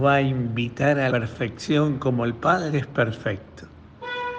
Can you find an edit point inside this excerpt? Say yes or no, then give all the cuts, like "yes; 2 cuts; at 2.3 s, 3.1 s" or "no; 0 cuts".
yes; 1 cut; at 1.1 s